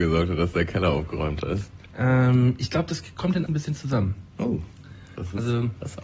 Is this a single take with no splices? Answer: no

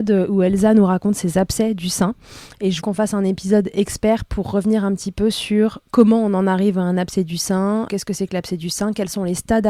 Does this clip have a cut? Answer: yes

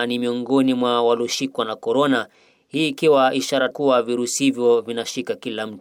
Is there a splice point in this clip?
yes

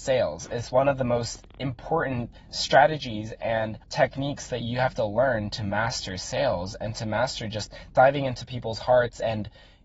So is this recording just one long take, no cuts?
no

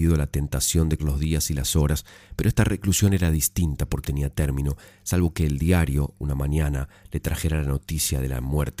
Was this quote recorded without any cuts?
no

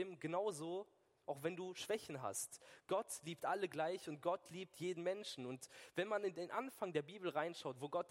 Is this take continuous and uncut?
yes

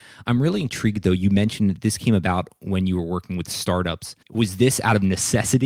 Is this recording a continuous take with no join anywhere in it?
no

